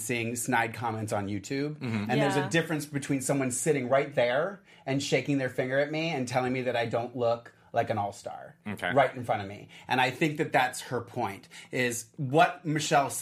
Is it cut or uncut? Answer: uncut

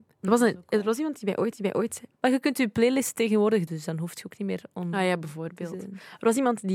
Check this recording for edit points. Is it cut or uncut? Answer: cut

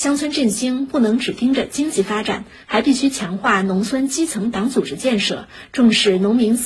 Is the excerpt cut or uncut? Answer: uncut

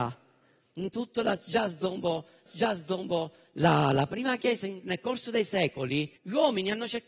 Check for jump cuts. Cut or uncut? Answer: cut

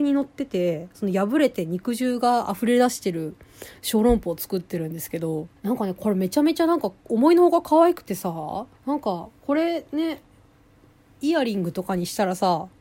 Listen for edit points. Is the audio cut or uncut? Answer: cut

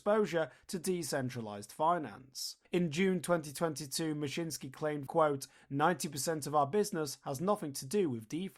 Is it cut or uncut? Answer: cut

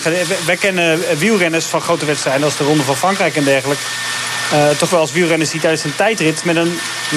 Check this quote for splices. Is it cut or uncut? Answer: cut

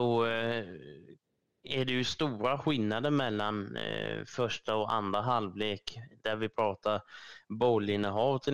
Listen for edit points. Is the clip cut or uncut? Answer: uncut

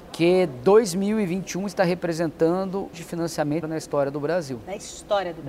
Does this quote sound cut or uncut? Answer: cut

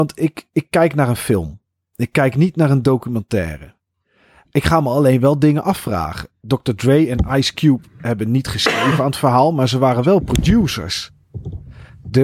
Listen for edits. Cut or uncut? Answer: uncut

